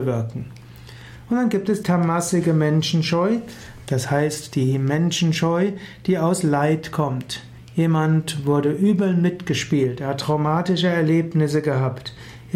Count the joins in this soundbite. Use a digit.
1